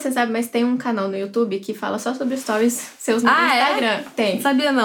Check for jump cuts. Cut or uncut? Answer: cut